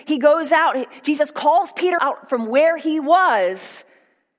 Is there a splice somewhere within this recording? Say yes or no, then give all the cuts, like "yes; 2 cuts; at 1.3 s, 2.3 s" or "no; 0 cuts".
yes; 1 cut; at 2.0 s